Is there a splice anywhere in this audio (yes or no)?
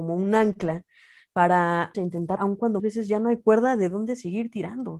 yes